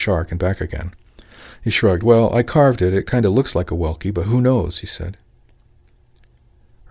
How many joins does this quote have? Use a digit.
0